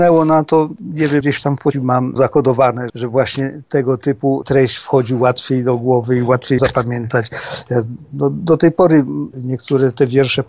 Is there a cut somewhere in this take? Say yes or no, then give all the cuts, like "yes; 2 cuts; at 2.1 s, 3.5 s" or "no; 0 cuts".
yes; 5 cuts; at 1.2 s, 1.7 s, 2.2 s, 2.9 s, 6.6 s